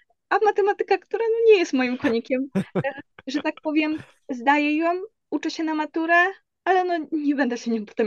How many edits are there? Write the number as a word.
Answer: zero